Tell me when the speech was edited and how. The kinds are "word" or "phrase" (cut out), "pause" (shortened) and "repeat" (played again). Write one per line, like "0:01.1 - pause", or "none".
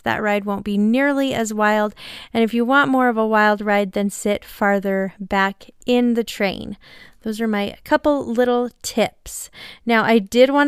none